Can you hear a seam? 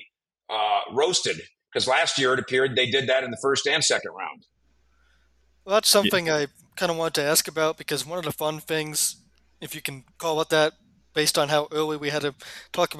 no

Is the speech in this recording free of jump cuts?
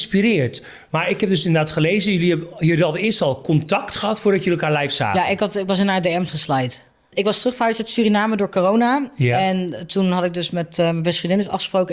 yes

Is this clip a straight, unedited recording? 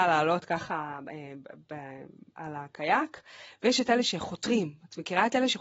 yes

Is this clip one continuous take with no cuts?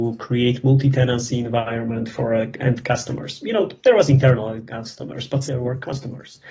no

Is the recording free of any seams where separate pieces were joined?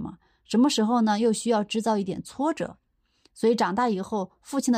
yes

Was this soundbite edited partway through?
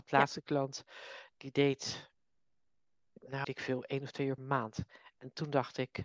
yes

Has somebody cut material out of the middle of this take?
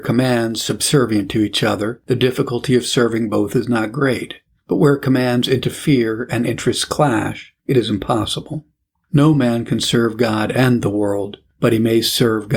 no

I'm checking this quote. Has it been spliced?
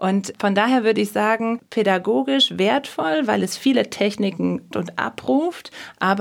yes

